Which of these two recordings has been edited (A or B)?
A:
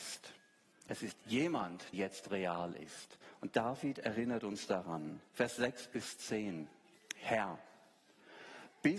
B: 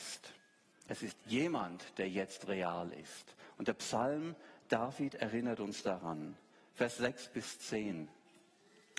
A